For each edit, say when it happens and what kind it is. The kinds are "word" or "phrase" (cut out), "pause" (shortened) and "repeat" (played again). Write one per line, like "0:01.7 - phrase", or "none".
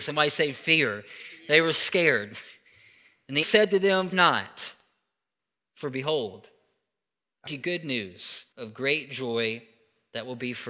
0:03.4 - word
0:04.1 - word
0:07.5 - word
0:08.5 - pause